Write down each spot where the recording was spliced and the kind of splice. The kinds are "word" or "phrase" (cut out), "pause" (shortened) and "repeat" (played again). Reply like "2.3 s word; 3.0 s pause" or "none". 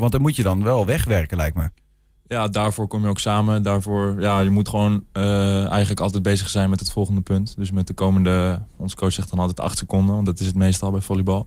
none